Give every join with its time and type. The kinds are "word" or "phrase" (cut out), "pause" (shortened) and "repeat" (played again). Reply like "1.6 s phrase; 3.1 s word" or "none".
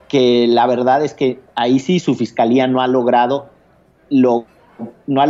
none